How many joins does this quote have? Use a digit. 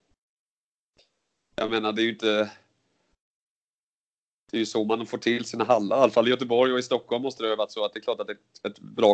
0